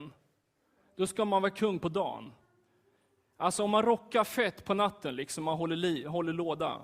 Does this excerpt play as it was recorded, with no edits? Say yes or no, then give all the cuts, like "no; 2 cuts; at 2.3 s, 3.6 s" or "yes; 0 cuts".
yes; 0 cuts